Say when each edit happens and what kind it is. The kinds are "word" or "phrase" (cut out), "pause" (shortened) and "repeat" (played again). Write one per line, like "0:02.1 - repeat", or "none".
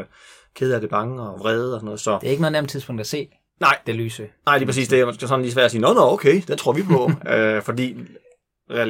none